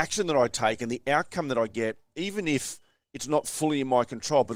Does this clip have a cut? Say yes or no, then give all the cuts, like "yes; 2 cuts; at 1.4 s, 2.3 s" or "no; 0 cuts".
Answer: no; 0 cuts